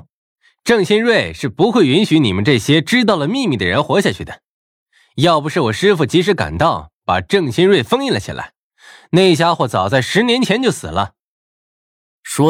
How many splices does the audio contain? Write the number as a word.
zero